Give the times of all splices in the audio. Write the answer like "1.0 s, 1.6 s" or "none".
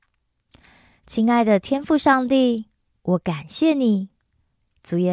none